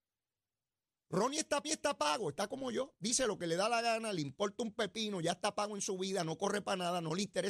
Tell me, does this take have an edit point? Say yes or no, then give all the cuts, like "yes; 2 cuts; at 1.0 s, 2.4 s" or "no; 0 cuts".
yes; 1 cut; at 1.6 s